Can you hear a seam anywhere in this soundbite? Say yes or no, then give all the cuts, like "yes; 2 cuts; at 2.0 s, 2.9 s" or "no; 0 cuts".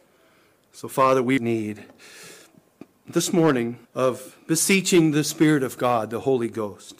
yes; 2 cuts; at 1.4 s, 3.8 s